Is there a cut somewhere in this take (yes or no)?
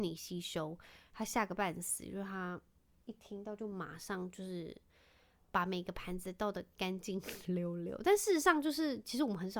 no